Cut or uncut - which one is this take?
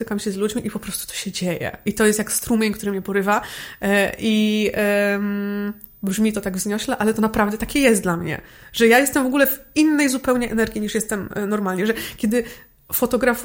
uncut